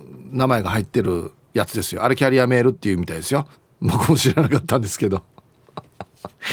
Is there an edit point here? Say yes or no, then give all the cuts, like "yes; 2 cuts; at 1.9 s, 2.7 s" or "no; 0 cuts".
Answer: yes; 1 cut; at 3.5 s